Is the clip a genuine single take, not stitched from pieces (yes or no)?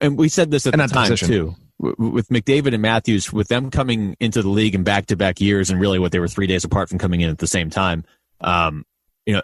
yes